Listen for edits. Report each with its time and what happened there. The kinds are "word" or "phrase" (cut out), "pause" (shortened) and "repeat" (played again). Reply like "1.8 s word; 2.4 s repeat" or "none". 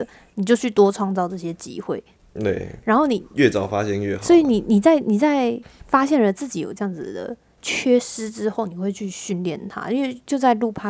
none